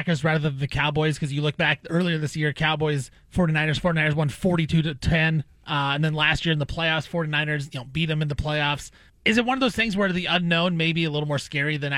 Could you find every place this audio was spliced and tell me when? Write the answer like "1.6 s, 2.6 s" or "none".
9.1 s

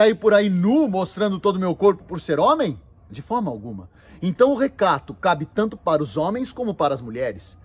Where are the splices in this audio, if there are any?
none

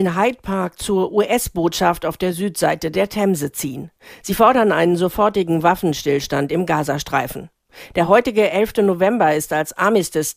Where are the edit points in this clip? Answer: none

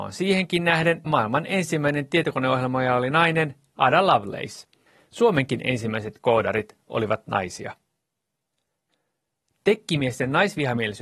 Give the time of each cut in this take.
1.1 s

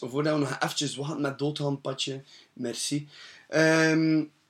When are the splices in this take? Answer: none

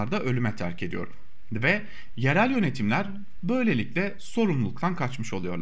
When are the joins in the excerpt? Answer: none

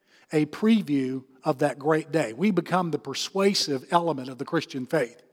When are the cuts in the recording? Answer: none

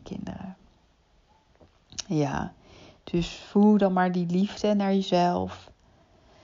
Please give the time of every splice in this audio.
none

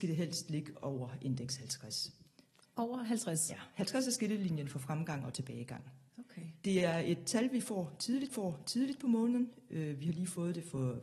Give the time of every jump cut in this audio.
6.1 s, 8.3 s

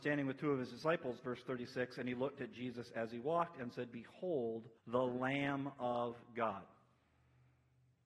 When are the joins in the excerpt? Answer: 4.8 s

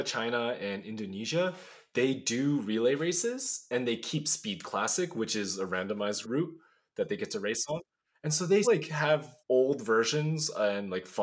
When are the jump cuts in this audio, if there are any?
6.2 s, 8.6 s, 9.4 s

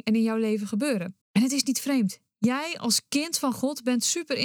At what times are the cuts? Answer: 1.2 s

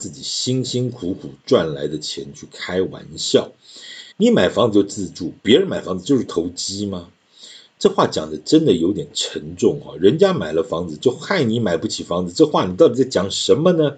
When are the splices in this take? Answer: 4.1 s

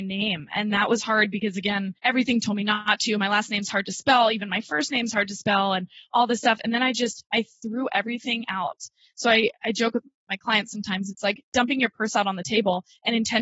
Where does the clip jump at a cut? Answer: 2.0 s

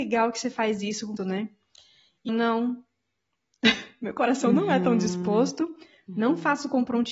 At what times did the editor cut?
1.2 s, 2.3 s

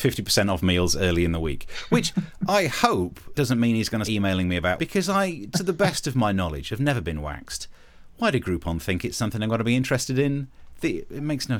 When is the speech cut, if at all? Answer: 3.3 s, 4.0 s, 4.8 s

